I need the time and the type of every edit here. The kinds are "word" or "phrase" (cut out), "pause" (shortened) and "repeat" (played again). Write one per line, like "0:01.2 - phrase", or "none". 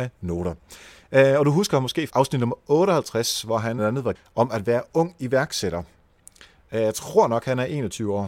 0:02.1 - word
0:03.8 - word
0:04.2 - word